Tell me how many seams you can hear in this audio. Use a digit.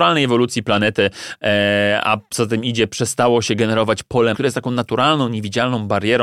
1